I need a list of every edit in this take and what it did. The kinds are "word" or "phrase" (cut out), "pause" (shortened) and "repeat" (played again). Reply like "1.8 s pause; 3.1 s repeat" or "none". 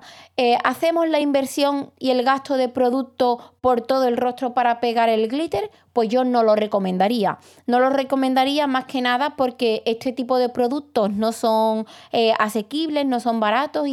none